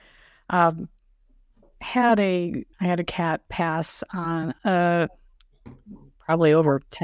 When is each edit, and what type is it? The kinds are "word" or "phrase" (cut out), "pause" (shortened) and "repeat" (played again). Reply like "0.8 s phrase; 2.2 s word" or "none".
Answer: 2.7 s pause; 4.6 s pause